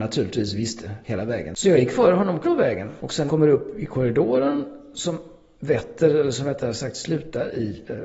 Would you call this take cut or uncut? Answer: cut